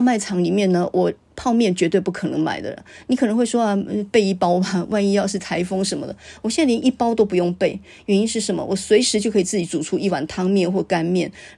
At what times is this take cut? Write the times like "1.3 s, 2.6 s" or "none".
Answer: none